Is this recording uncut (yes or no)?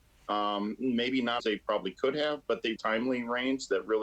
no